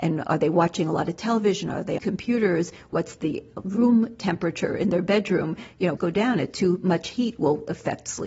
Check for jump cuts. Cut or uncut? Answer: cut